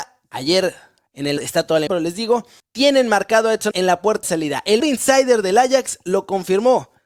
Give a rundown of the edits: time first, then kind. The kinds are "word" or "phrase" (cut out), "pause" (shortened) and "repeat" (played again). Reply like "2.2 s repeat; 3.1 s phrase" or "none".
1.4 s word; 1.9 s word; 2.6 s word; 3.7 s word; 4.2 s word; 4.8 s word